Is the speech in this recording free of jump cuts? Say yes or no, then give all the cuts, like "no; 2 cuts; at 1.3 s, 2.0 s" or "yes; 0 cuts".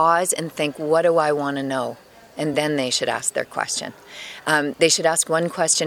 yes; 0 cuts